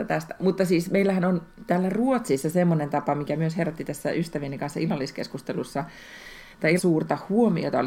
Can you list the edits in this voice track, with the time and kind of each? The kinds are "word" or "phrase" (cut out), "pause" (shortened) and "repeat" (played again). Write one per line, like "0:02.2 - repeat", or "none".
0:06.8 - word